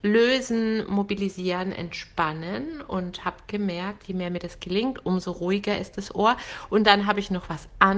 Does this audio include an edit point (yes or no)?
no